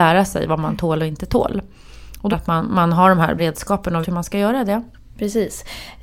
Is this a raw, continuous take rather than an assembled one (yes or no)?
no